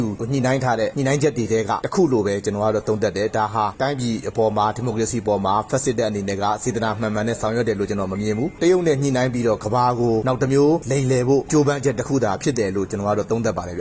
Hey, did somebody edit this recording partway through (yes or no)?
no